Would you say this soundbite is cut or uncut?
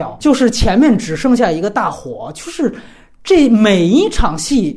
uncut